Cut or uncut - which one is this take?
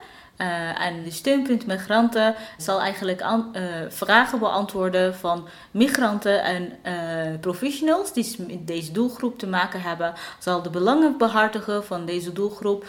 cut